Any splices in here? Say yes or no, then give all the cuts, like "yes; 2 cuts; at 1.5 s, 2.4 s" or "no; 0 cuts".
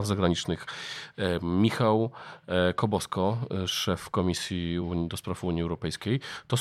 no; 0 cuts